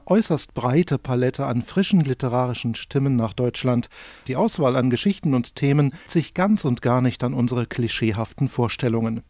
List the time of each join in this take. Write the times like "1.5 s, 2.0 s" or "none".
4.3 s, 6.1 s